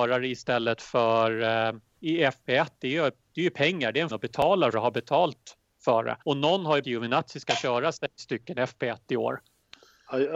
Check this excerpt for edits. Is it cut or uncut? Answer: cut